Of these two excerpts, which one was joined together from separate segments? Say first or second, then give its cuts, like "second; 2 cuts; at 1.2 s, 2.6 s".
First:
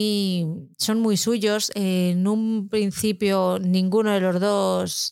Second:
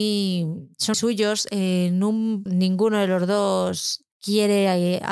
second; 3 cuts; at 0.9 s, 2.5 s, 4.1 s